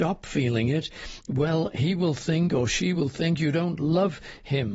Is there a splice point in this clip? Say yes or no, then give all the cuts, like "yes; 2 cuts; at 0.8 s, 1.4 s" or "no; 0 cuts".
no; 0 cuts